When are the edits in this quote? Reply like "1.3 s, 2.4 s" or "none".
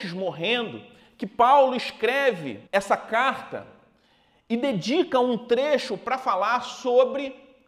2.7 s

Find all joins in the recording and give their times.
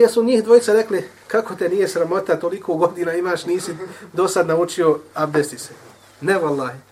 none

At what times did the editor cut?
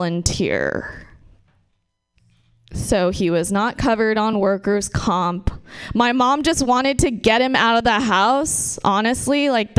none

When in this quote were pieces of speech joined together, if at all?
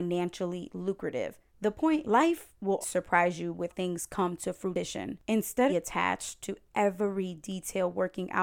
1.5 s, 2.0 s, 2.8 s, 3.7 s, 5.7 s

